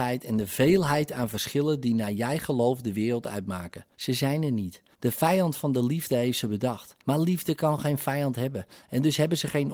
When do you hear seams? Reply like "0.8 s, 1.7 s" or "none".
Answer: 3.9 s, 4.9 s, 7.0 s